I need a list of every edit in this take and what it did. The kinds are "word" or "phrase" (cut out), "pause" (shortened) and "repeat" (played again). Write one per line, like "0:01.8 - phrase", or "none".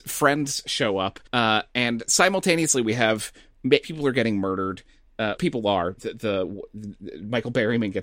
0:01.3 - pause
0:03.8 - word
0:05.4 - word
0:06.0 - word